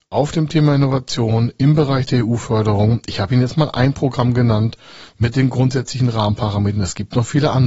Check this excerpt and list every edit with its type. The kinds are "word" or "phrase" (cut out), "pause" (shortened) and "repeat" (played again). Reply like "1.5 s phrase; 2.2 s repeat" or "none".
none